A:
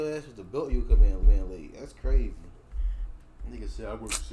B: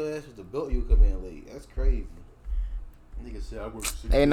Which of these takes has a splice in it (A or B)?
A